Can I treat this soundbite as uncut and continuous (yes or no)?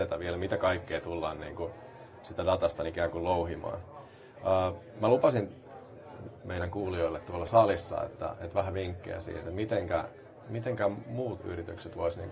yes